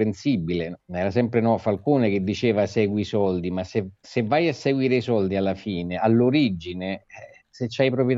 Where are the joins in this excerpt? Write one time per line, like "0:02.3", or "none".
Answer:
0:04.0